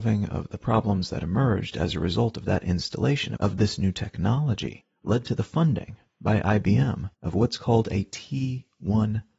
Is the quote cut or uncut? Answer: uncut